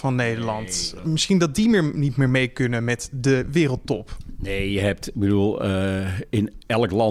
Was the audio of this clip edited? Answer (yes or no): no